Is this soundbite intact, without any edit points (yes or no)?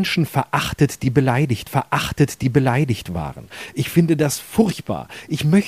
no